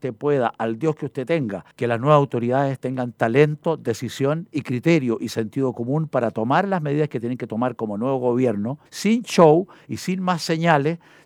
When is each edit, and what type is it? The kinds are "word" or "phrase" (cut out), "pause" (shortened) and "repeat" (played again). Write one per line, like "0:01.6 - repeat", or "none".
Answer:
0:01.7 - pause
0:08.9 - pause